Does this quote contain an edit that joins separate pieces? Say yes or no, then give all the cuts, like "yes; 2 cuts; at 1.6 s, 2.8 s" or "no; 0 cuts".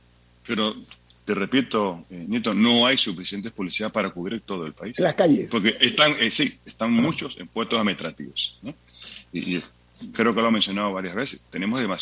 yes; 1 cut; at 10.1 s